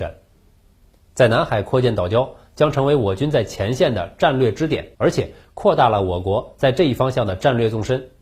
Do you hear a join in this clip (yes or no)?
yes